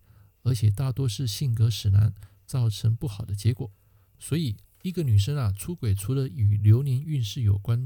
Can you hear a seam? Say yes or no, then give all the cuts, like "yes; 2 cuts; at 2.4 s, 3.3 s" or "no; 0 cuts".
no; 0 cuts